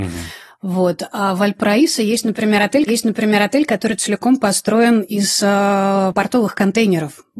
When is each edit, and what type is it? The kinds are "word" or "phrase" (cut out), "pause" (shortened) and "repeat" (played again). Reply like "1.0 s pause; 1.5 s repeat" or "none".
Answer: 2.9 s repeat

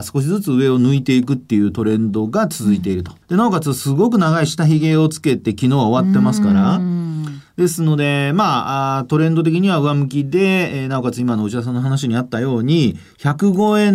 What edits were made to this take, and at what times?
3.2 s pause

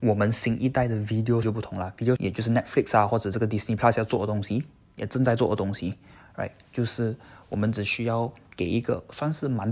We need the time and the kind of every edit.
1.4 s word; 2.2 s word

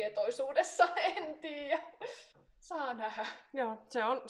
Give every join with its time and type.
2.3 s pause

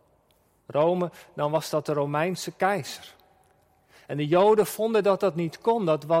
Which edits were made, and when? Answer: none

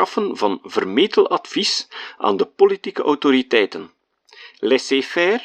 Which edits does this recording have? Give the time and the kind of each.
none

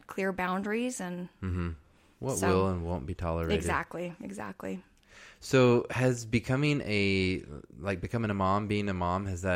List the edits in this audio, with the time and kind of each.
none

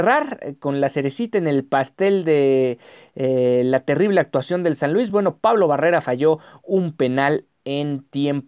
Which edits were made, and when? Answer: none

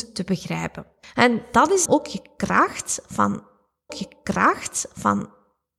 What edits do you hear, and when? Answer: 1.0 s pause; 1.9 s word; 3.9 s repeat

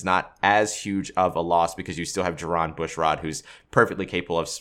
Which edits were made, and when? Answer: none

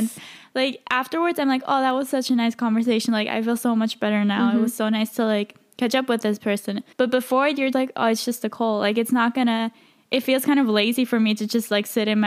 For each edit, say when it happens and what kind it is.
6.9 s pause; 7.7 s word

